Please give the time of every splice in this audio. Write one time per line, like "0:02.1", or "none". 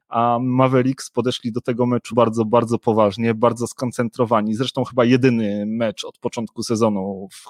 0:02.1